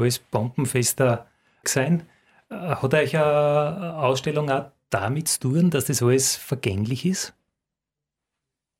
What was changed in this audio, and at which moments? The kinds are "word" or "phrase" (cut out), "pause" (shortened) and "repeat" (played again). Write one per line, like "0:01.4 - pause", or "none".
0:01.6 - word